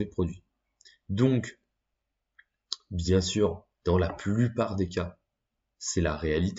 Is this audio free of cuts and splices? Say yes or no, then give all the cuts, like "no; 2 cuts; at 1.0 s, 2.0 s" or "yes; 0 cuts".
no; 1 cut; at 3.7 s